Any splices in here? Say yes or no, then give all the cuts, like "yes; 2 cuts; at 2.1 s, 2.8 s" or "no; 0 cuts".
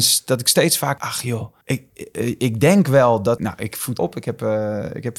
yes; 4 cuts; at 1.0 s, 1.6 s, 3.4 s, 4.0 s